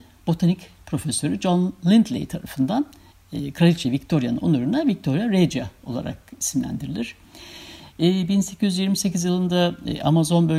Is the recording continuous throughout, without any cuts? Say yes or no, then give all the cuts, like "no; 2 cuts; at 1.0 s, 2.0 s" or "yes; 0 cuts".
yes; 0 cuts